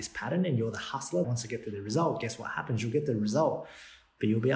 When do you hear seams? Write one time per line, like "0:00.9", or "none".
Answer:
0:01.2